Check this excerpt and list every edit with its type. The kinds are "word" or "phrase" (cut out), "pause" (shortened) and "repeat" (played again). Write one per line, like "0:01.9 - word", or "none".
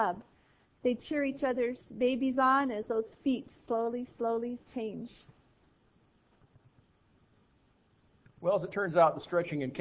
none